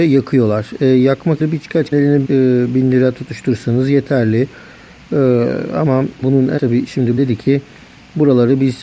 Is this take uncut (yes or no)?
no